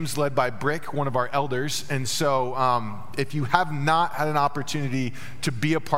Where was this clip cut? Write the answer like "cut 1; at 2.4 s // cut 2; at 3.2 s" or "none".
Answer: none